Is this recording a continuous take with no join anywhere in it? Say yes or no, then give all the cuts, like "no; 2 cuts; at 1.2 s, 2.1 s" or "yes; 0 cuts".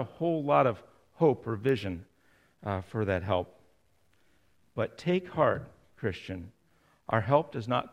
yes; 0 cuts